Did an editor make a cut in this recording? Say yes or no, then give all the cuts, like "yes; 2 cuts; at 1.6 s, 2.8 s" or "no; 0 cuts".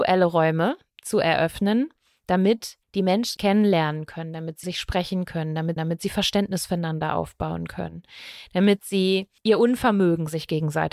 yes; 5 cuts; at 2.8 s, 3.4 s, 4.6 s, 5.8 s, 9.4 s